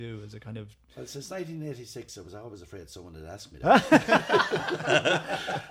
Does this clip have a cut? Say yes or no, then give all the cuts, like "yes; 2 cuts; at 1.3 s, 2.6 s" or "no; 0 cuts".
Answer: no; 0 cuts